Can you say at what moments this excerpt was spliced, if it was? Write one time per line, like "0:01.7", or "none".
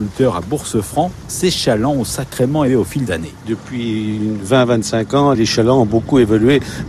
0:02.7
0:03.1
0:05.3

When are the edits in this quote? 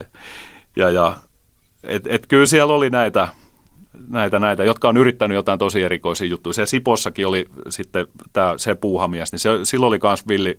none

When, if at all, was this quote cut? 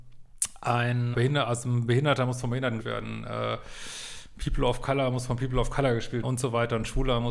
0:01.1
0:02.8
0:06.2

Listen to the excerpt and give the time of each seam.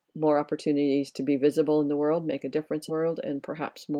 0:02.9

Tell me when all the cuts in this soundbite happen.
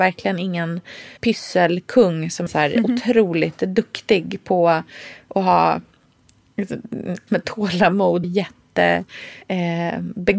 0:01.2
0:02.5
0:07.3
0:08.2
0:09.4

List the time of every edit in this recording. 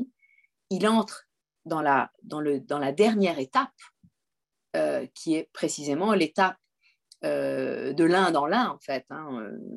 none

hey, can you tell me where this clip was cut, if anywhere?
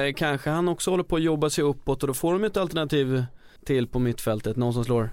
0:03.6

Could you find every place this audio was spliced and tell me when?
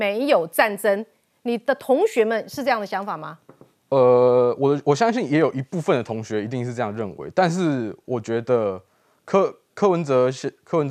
none

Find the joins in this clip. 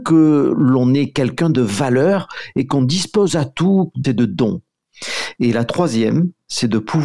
0:03.3
0:04.0

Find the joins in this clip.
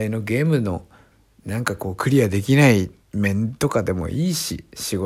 0:03.0

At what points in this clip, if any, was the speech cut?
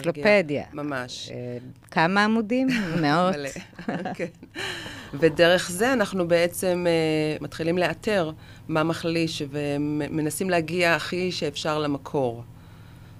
0:07.4

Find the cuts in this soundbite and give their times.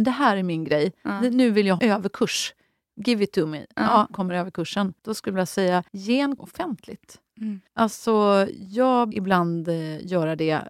0:01.8
0:04.1
0:05.0
0:05.9
0:06.4
0:07.7
0:09.1

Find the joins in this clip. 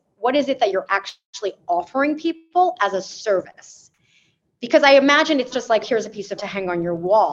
0:05.5
0:05.8
0:06.4

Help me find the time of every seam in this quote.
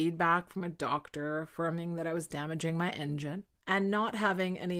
0:03.6

